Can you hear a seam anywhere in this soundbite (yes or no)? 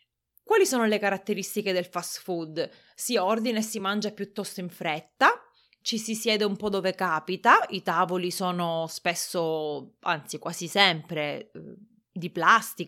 no